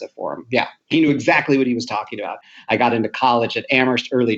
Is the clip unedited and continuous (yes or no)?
yes